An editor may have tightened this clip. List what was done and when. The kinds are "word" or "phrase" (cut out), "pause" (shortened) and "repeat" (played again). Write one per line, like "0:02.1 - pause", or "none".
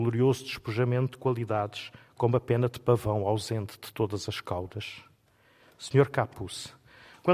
none